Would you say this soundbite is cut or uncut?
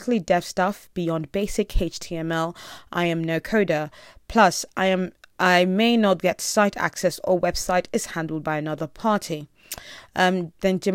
uncut